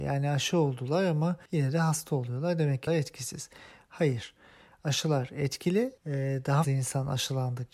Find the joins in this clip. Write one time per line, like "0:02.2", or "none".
0:01.5
0:02.9
0:06.0
0:06.6